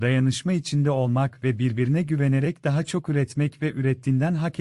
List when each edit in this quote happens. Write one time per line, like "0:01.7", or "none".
none